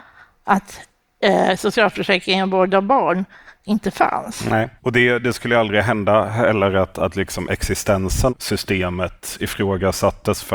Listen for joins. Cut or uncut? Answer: cut